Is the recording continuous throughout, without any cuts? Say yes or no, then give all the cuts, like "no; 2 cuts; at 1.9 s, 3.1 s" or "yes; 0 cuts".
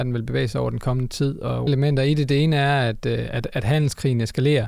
no; 1 cut; at 1.7 s